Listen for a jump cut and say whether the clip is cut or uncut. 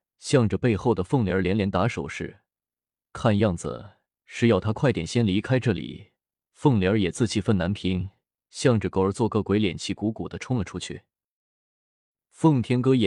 uncut